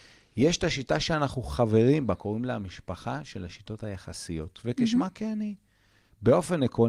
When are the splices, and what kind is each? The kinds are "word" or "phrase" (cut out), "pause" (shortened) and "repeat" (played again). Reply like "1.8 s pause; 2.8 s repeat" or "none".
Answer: none

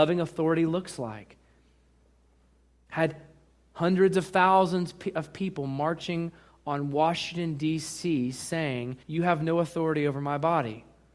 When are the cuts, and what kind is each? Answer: 9.0 s pause

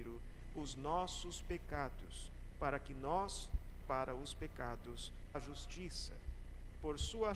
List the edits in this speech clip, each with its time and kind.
3.8 s word; 5.3 s phrase

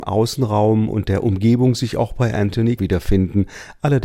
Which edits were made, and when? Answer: 2.8 s word

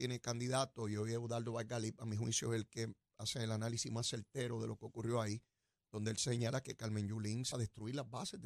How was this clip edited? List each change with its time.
7.5 s word

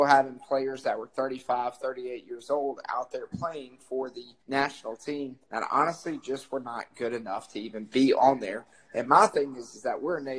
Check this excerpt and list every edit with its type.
4.4 s pause; 5.4 s pause

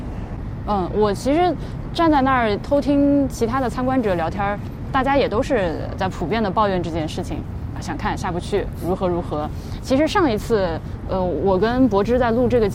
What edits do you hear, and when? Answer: none

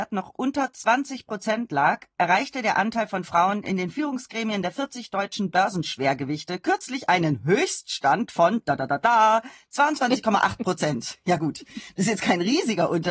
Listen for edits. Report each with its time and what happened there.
none

